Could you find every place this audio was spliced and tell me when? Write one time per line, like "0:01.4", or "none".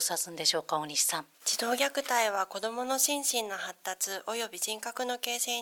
0:01.3